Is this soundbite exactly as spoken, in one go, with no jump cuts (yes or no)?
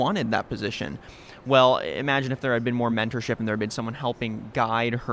yes